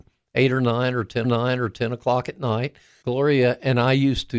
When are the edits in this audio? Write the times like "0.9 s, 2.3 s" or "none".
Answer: 1.2 s, 3.0 s